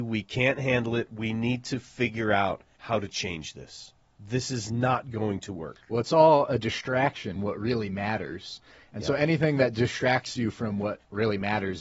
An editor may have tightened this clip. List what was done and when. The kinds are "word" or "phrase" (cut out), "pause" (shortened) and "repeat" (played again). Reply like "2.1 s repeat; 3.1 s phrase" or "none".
2.8 s pause; 7.4 s phrase